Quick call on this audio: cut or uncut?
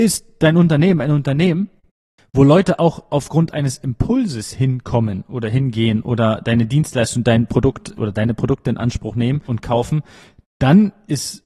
uncut